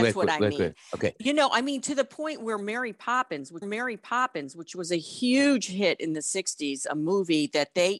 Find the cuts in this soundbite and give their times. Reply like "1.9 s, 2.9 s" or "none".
3.6 s